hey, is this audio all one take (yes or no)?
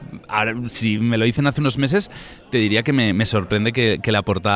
yes